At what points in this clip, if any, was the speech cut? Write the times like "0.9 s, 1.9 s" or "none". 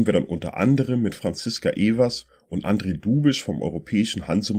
none